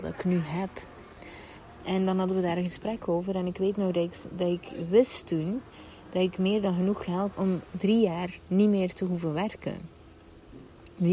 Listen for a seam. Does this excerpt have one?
yes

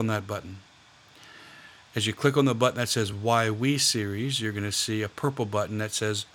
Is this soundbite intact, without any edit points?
yes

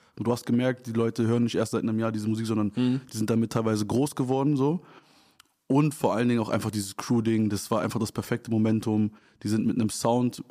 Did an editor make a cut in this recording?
no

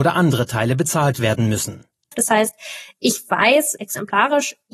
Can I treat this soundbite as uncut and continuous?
yes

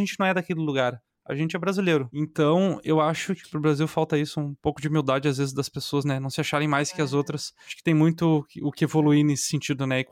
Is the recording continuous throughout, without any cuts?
yes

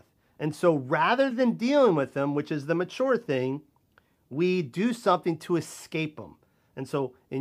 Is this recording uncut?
yes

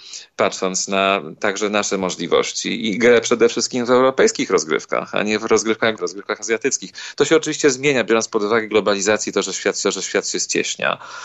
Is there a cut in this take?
yes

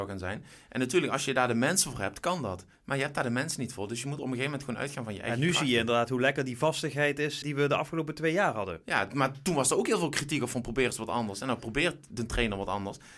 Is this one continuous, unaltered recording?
no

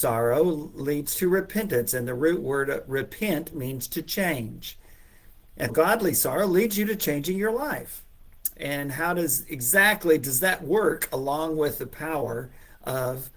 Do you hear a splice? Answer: yes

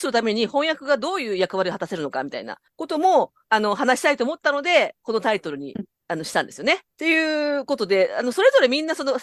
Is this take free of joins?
no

